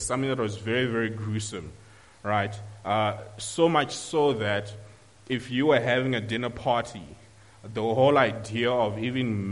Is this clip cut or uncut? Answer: uncut